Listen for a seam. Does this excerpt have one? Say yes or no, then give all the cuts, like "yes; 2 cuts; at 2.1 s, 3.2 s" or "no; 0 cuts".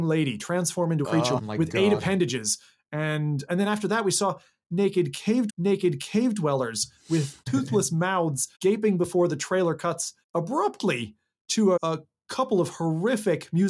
yes; 8 cuts; at 1.0 s, 1.4 s, 3.5 s, 5.5 s, 7.4 s, 8.5 s, 10.2 s, 11.8 s